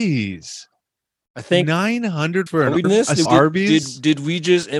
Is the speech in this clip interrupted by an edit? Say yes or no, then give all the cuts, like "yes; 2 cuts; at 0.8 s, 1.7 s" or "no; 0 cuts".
yes; 3 cuts; at 2.5 s, 2.8 s, 3.3 s